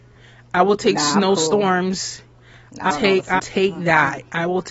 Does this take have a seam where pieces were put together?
yes; 2 cuts; at 2.9 s, 3.4 s

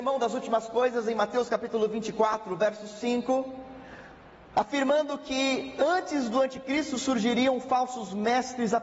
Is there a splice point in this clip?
no; 0 cuts

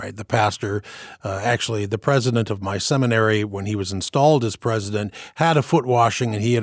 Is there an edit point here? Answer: no; 0 cuts

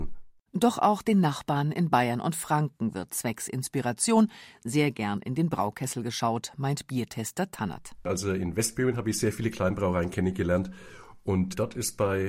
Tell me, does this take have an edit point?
no; 0 cuts

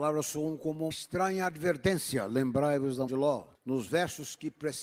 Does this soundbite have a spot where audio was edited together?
yes; 3 cuts; at 0.9 s, 3.1 s, 3.5 s

